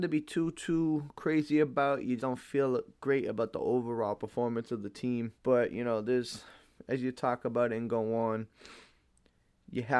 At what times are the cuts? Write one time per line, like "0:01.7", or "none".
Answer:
0:02.2
0:05.4